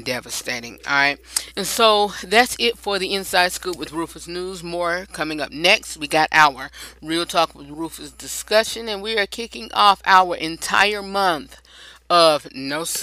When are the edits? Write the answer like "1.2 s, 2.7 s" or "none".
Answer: none